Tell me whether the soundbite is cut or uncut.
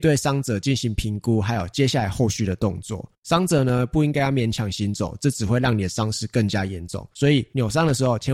cut